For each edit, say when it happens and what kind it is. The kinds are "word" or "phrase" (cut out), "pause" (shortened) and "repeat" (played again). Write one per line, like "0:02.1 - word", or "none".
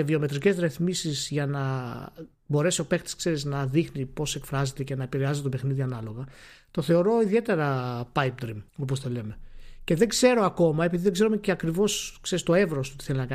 0:02.3 - pause
0:08.7 - pause